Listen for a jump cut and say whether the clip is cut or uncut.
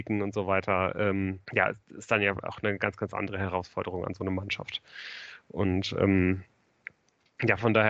cut